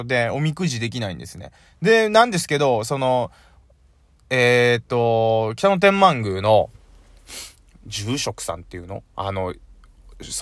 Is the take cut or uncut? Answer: cut